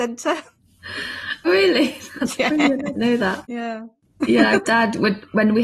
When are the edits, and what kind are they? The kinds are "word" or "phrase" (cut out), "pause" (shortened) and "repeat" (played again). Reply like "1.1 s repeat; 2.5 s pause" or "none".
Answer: 1.4 s word; 2.9 s word; 4.6 s word